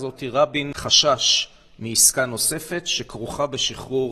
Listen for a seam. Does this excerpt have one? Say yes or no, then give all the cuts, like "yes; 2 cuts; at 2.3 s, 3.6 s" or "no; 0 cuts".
no; 0 cuts